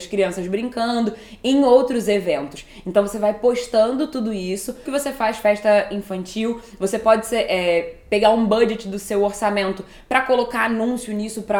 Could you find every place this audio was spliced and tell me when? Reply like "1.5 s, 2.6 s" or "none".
4.9 s

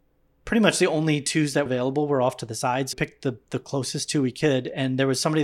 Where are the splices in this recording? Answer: 1.7 s, 2.9 s

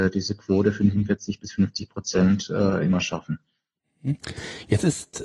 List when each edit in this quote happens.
none

